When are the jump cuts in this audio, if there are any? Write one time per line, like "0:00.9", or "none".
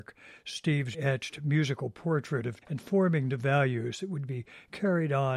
0:00.9
0:02.6